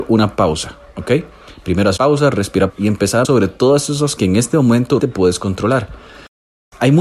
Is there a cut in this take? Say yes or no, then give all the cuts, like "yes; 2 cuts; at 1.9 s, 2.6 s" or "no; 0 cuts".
yes; 5 cuts; at 2.0 s, 2.7 s, 3.2 s, 4.2 s, 5.0 s